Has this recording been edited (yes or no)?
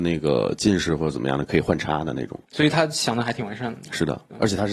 no